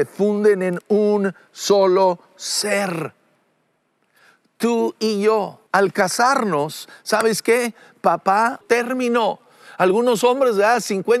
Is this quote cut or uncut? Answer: cut